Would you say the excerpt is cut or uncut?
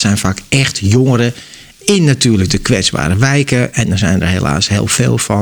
uncut